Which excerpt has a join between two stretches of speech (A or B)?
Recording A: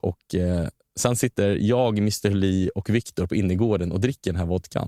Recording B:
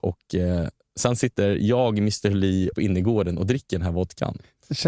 B